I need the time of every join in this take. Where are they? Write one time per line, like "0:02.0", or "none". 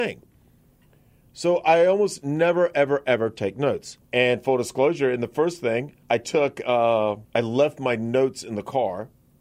0:04.0
0:06.0
0:07.2